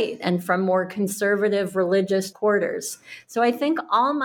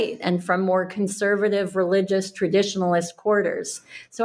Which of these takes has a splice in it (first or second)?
first